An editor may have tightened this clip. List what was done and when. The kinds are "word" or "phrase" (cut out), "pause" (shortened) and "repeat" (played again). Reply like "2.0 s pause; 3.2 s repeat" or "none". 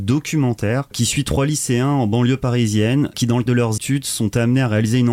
3.5 s word; 3.8 s word